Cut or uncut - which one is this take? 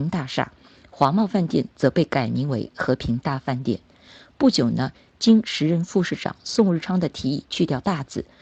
uncut